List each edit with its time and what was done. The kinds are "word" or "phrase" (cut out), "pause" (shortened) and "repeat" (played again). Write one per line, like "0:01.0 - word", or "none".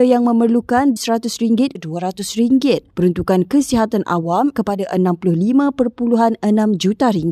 0:01.0 - phrase
0:01.8 - word
0:02.9 - pause
0:04.5 - word